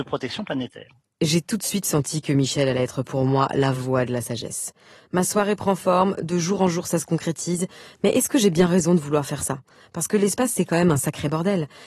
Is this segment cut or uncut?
uncut